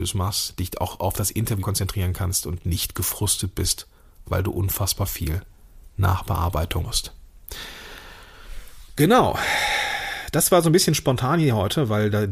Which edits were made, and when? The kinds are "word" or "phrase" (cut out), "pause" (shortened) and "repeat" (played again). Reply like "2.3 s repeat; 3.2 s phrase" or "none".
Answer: 1.6 s word; 6.8 s word